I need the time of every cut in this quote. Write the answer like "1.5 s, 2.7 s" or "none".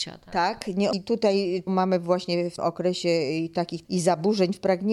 0.9 s, 1.7 s, 2.6 s, 3.8 s